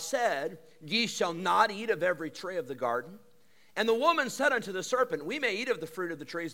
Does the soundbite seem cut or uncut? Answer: uncut